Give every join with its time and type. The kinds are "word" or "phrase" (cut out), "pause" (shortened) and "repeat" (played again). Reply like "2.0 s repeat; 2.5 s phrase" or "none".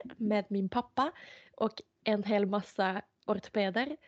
none